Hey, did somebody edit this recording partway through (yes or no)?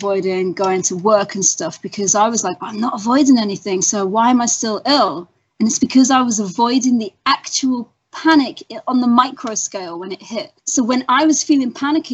yes